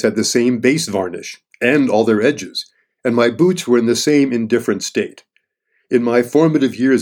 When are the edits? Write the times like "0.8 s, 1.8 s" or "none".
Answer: none